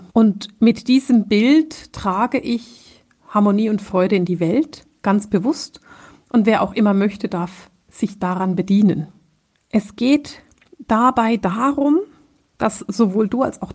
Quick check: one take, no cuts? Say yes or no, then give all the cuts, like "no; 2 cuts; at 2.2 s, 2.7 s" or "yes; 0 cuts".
yes; 0 cuts